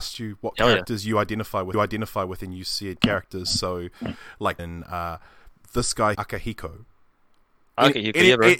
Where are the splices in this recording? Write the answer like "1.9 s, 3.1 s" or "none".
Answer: 1.7 s, 3.0 s, 4.6 s, 6.1 s